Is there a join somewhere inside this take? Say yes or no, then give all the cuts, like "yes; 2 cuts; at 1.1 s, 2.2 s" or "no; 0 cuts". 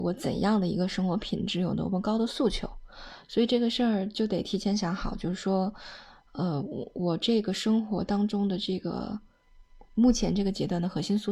no; 0 cuts